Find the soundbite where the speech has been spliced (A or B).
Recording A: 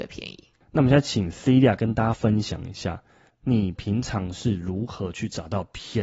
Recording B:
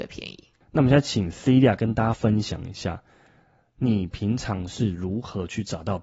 A